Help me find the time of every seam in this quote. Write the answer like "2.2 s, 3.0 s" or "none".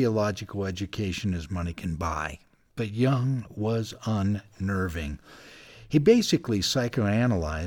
none